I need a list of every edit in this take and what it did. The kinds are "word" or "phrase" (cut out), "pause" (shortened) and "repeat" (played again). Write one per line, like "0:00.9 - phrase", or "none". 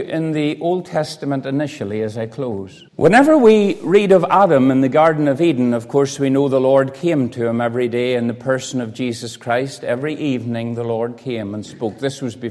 0:02.9 - pause

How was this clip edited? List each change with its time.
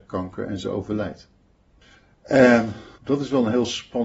0:02.9 - pause

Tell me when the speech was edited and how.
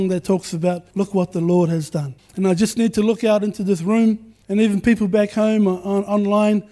0:00.9 - pause
0:02.2 - pause
0:04.4 - pause

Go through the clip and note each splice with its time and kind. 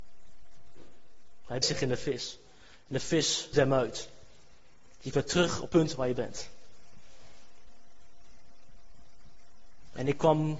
0:01.6 - word
0:03.5 - word
0:05.1 - word
0:05.7 - word
0:06.1 - word

